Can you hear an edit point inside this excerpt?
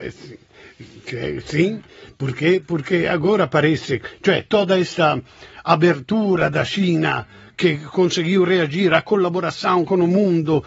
no; 0 cuts

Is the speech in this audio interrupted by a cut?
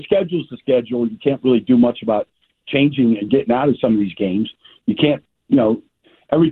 no; 0 cuts

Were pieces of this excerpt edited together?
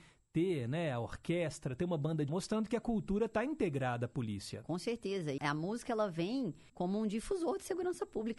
yes; 3 cuts; at 2.3 s, 5.4 s, 6.7 s

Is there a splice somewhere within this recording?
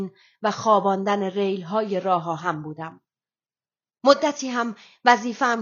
no; 0 cuts

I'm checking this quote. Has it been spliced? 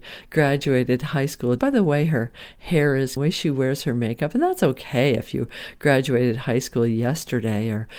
yes; 2 cuts; at 1.6 s, 3.2 s

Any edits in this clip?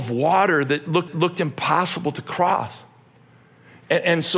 yes; 1 cut; at 1.1 s

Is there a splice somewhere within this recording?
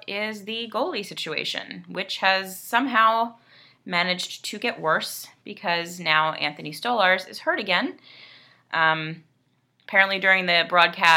no; 0 cuts

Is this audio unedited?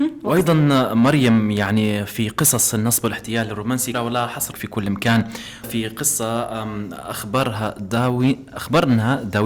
no; 3 cuts; at 3.9 s, 4.5 s, 5.6 s

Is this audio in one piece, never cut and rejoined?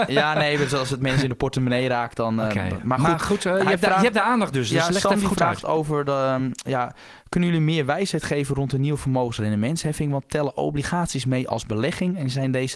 yes; 0 cuts

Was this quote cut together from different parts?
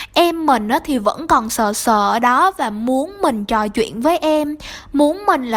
no; 0 cuts

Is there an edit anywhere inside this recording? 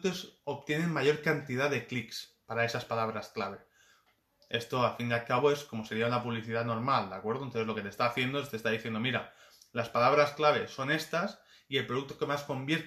no; 0 cuts

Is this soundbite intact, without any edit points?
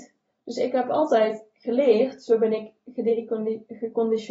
yes; 0 cuts

